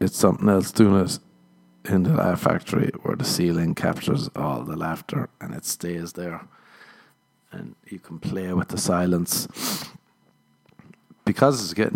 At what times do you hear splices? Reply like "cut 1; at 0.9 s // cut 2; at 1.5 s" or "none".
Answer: none